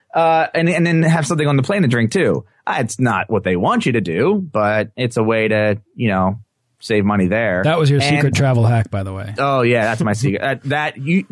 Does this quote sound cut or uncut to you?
uncut